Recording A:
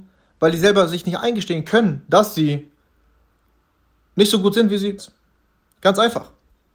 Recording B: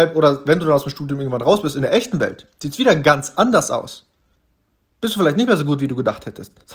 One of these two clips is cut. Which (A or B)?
A